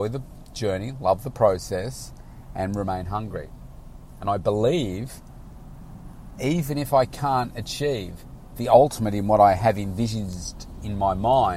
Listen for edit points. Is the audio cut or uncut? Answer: uncut